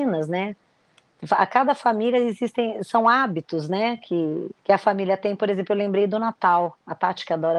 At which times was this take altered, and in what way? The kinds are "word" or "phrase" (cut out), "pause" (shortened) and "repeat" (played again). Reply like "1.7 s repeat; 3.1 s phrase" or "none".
4.6 s pause